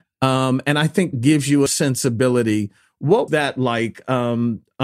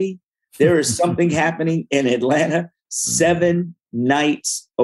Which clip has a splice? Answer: first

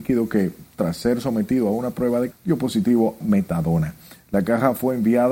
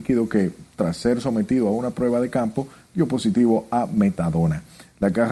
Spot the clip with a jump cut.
first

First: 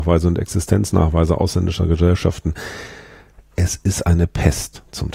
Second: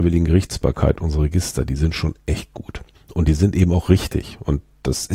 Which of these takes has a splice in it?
second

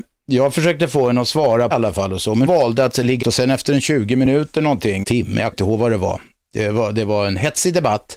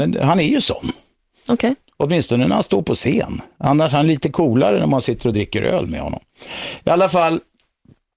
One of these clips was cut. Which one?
first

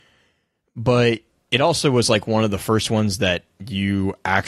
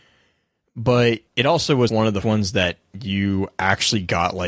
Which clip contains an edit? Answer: second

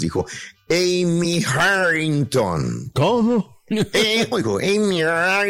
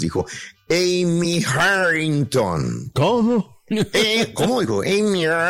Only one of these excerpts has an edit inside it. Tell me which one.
first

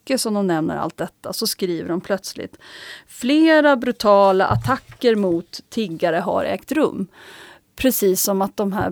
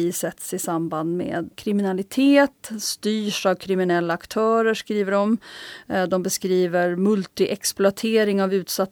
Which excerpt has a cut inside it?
second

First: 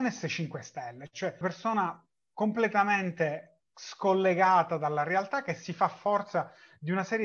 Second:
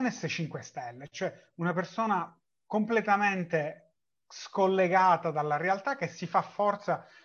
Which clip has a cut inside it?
first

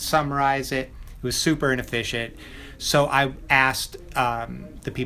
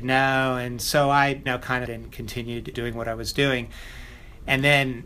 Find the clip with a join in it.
second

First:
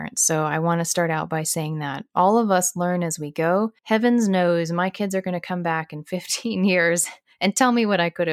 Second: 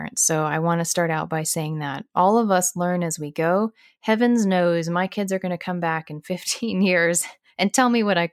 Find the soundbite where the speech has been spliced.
first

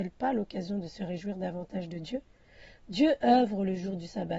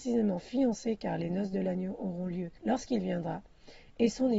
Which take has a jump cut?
second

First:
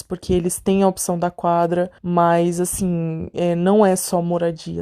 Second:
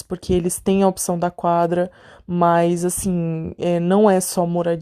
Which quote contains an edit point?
first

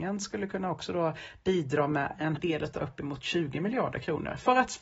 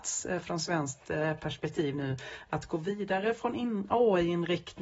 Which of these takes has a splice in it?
first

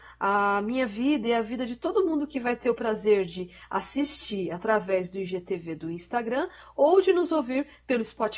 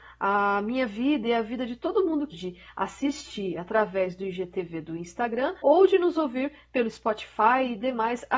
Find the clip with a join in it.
second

